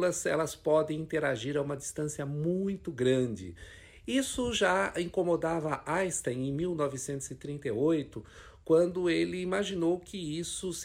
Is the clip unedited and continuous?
yes; 0 cuts

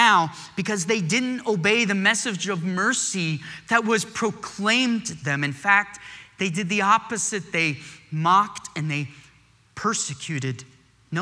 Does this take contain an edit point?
yes; 1 cut; at 5.2 s

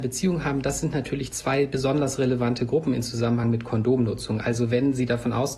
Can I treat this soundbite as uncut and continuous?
yes; 0 cuts

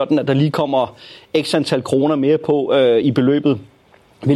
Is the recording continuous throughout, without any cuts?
yes; 0 cuts

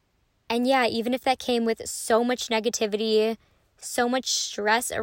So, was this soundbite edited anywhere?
no; 0 cuts

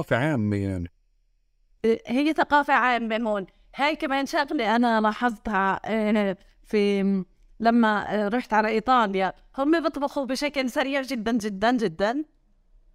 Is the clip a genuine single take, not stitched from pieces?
yes; 0 cuts

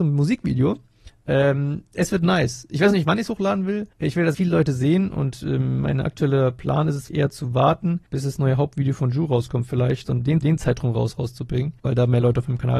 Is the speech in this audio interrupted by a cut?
yes; 7 cuts; at 3.9 s, 4.3 s, 7.1 s, 8.1 s, 10.0 s, 10.4 s, 11.8 s

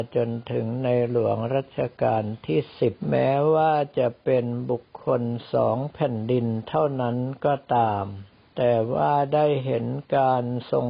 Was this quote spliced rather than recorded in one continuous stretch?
yes; 2 cuts; at 3.0 s, 8.5 s

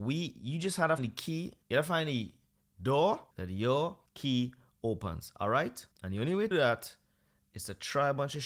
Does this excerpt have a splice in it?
yes; 6 cuts; at 1.0 s, 1.6 s, 3.3 s, 4.1 s, 5.9 s, 6.5 s

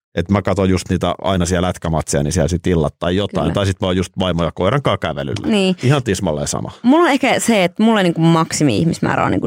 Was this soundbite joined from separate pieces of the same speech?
no; 0 cuts

